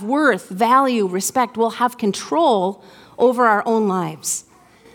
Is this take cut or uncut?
uncut